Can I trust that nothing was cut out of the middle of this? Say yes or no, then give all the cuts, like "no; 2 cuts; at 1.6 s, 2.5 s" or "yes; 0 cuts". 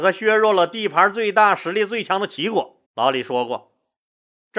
no; 1 cut; at 2.9 s